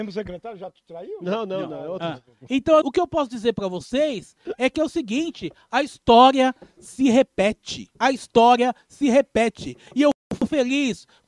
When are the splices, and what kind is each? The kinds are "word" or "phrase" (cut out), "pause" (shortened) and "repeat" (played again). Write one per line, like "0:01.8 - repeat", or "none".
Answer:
0:02.8 - word
0:07.9 - pause